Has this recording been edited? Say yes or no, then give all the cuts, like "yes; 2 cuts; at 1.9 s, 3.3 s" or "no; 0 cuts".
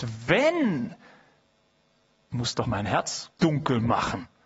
yes; 3 cuts; at 2.3 s, 2.6 s, 3.4 s